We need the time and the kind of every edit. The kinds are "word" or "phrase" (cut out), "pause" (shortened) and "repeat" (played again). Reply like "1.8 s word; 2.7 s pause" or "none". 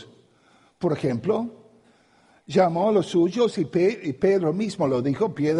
none